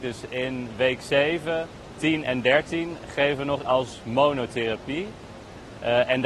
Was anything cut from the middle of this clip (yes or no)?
yes